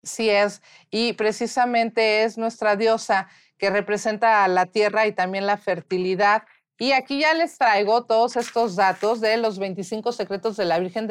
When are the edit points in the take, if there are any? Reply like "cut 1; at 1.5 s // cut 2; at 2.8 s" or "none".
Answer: none